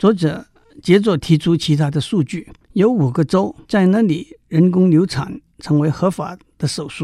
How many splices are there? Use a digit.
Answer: 2